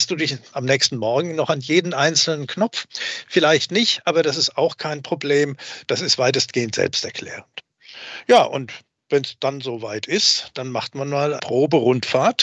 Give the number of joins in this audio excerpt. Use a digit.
1